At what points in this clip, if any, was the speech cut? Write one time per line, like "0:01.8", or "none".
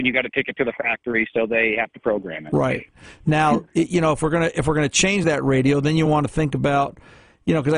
none